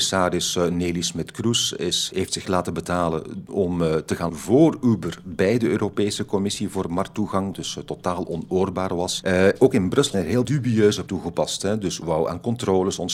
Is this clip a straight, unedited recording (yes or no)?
no